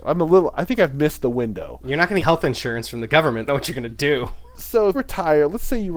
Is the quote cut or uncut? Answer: cut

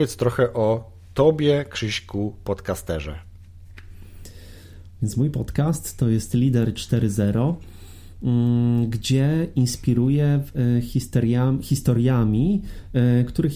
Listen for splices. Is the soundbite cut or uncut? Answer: uncut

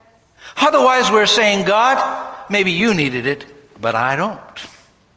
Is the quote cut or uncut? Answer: uncut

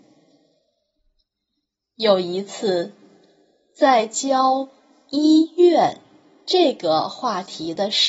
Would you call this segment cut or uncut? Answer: uncut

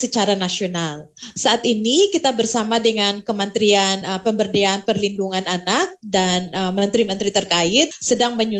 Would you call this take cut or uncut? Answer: uncut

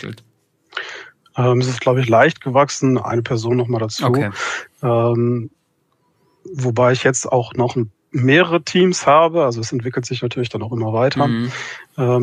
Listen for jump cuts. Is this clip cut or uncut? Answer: uncut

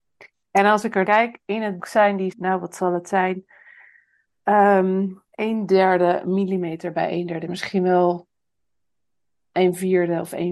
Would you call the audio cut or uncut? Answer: cut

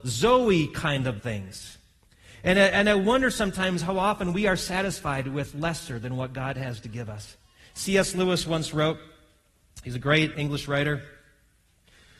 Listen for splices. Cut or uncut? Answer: cut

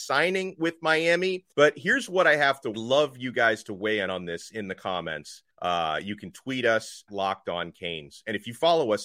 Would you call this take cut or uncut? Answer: cut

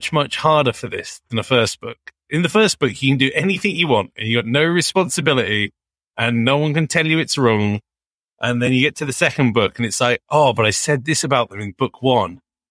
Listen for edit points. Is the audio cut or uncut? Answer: uncut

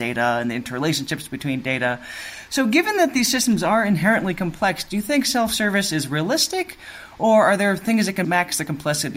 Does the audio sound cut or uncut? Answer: uncut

